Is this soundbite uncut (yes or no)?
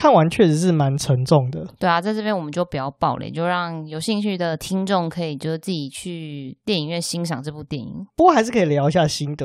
no